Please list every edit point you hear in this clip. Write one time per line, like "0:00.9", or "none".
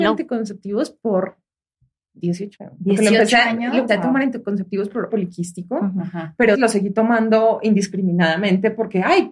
0:02.6
0:03.9
0:05.1
0:06.5